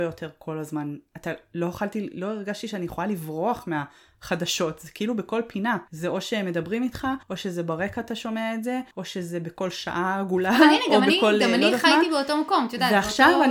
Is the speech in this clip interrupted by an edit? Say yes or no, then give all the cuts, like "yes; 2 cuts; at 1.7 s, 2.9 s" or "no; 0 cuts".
yes; 4 cuts; at 1.1 s, 5.9 s, 7.2 s, 8.9 s